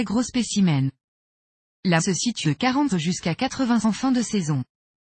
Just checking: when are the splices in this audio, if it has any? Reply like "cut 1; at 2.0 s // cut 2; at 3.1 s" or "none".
cut 1; at 2.0 s // cut 2; at 2.4 s // cut 3; at 2.9 s // cut 4; at 3.8 s